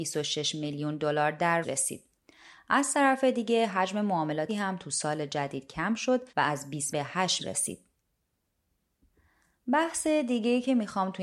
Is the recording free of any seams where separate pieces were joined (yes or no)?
no